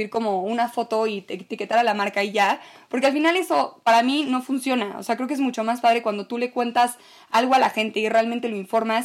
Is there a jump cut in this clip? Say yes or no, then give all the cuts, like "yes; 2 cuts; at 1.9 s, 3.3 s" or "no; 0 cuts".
no; 0 cuts